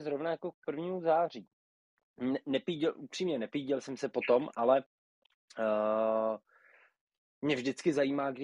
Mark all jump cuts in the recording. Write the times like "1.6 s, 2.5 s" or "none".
none